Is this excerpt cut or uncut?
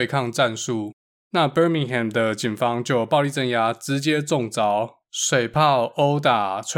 uncut